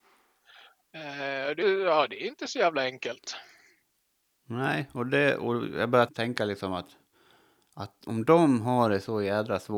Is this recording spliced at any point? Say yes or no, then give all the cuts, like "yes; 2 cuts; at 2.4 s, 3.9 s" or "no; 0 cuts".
yes; 2 cuts; at 1.6 s, 6.1 s